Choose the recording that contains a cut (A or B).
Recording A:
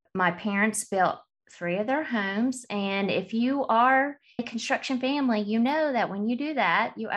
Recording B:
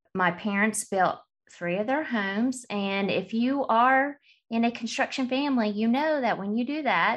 A